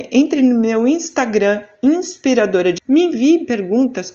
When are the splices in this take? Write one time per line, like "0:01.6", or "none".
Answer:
0:02.8